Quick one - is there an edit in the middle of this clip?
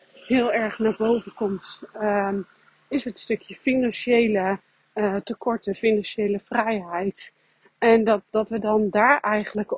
no; 0 cuts

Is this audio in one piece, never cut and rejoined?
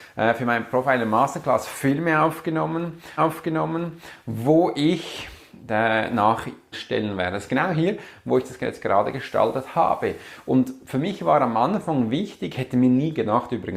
no; 2 cuts; at 3.2 s, 6.7 s

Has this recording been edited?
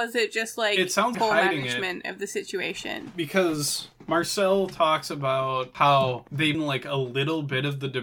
yes; 2 cuts; at 1.1 s, 6.5 s

